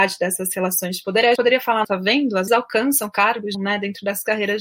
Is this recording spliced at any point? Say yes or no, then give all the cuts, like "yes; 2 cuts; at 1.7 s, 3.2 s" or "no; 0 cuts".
yes; 4 cuts; at 1.4 s, 1.8 s, 2.5 s, 3.5 s